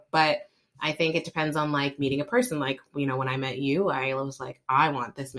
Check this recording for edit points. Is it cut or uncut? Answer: uncut